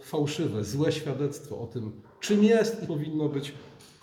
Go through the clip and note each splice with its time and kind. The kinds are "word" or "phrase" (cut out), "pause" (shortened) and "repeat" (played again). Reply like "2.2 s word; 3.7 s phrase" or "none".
2.9 s word